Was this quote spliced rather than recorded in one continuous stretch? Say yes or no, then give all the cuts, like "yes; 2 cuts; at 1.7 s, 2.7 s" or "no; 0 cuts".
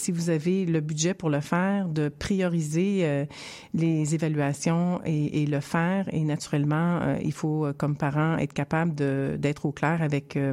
no; 0 cuts